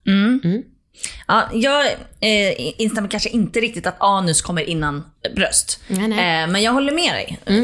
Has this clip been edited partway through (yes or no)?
no